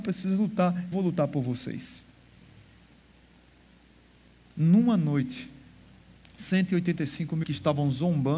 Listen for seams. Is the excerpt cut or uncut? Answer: cut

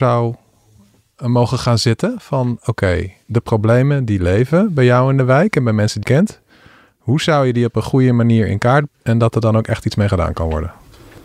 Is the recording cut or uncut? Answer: cut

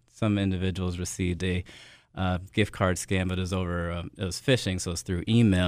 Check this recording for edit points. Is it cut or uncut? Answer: uncut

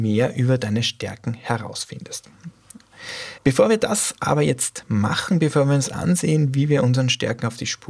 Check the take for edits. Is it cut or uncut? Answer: cut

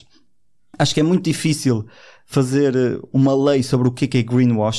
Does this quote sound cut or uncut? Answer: uncut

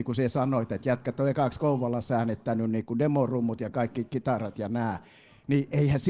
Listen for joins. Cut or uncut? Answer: uncut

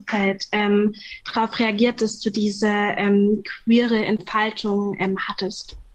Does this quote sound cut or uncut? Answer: uncut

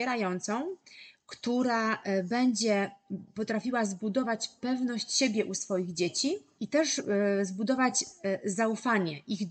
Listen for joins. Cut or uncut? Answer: uncut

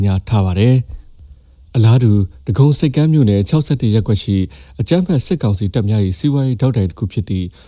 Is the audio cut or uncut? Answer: uncut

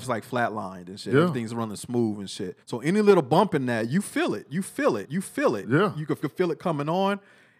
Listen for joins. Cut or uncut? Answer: cut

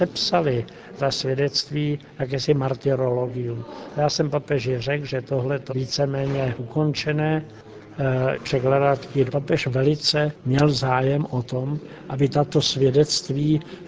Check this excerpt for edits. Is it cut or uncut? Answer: cut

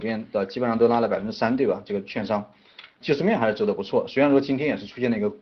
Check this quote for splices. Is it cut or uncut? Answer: cut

